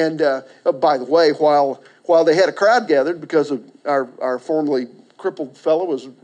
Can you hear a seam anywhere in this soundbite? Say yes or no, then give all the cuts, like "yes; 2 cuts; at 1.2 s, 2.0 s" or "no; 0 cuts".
no; 0 cuts